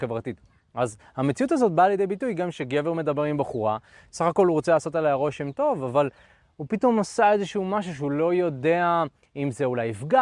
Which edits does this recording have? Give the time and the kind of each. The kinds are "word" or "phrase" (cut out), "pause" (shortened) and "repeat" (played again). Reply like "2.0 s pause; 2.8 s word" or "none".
none